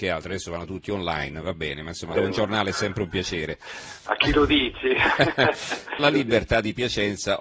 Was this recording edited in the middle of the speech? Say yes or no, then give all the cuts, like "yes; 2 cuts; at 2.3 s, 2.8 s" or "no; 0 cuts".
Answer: yes; 2 cuts; at 2.2 s, 6.0 s